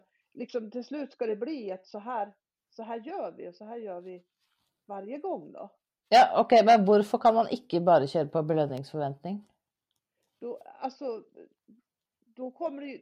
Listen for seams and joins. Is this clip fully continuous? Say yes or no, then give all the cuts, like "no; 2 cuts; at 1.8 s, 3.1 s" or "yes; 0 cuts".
yes; 0 cuts